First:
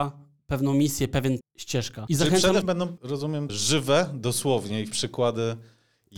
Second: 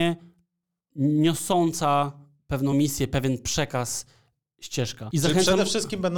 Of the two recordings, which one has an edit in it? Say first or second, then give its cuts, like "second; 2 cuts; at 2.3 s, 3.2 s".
first; 4 cuts; at 1.4 s, 2.6 s, 3.5 s, 4.9 s